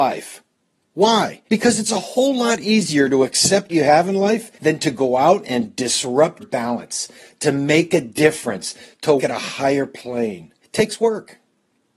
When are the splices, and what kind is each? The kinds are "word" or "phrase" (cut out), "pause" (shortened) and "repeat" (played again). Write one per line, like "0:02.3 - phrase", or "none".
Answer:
0:01.5 - pause
0:03.7 - word
0:04.6 - pause
0:06.4 - word
0:09.2 - word
0:10.6 - pause